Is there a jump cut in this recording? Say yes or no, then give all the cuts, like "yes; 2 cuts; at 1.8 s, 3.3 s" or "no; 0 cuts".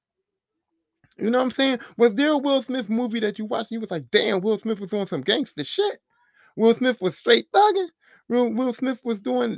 no; 0 cuts